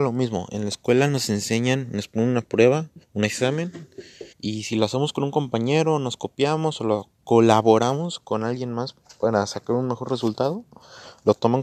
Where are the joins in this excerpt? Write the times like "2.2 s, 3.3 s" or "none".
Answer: 3.0 s, 4.3 s